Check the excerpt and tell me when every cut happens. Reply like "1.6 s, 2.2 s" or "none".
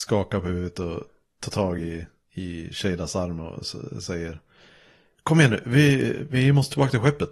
none